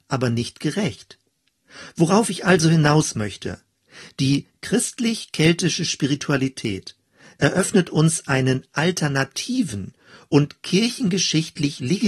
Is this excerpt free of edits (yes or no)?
yes